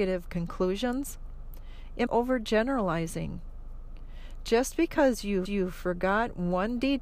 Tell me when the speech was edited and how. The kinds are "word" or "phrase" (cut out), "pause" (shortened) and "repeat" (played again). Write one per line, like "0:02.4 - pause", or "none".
0:02.1 - word
0:05.4 - repeat